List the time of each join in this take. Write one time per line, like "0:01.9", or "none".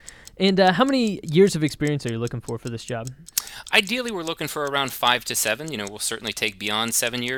none